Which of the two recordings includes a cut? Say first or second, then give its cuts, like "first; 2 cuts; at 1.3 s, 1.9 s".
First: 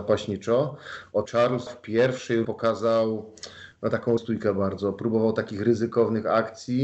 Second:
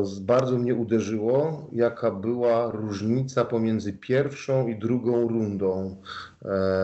first; 4 cuts; at 1.2 s, 1.7 s, 2.4 s, 4.2 s